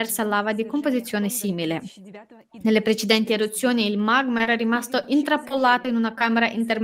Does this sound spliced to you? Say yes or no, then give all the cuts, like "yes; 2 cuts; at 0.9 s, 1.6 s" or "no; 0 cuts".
no; 0 cuts